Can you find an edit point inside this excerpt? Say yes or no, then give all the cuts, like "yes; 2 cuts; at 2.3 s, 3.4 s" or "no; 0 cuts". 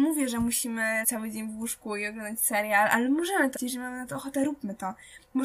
yes; 2 cuts; at 1.0 s, 3.5 s